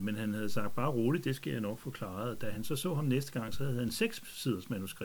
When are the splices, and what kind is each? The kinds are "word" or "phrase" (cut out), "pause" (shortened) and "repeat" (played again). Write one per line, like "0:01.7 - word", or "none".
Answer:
none